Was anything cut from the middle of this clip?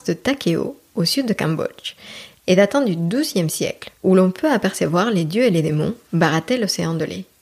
yes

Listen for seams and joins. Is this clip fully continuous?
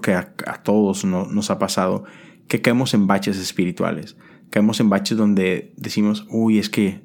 yes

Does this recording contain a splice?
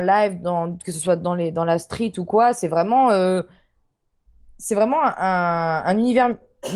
no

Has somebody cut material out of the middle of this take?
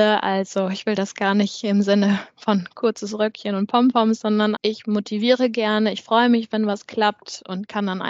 yes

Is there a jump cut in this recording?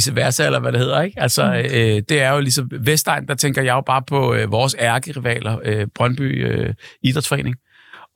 no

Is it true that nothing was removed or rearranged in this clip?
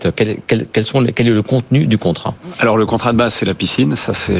yes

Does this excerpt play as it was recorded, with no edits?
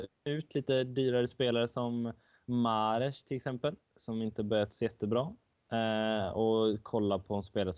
yes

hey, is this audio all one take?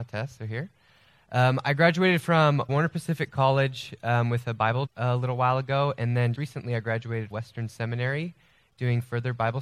no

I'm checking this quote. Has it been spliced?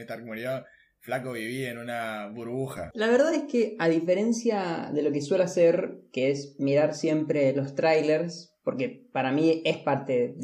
no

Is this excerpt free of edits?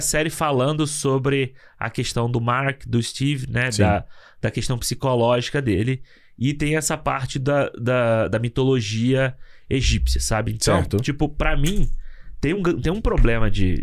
yes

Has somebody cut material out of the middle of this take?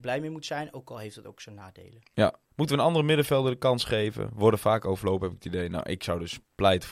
yes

